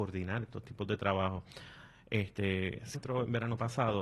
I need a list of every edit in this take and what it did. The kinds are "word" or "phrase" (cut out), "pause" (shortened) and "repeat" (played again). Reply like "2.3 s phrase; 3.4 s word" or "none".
2.9 s word